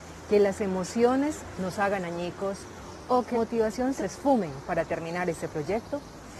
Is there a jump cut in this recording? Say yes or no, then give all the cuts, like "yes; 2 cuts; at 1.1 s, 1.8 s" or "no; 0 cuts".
yes; 2 cuts; at 3.3 s, 4.0 s